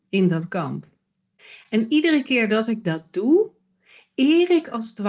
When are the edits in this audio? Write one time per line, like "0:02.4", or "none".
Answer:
none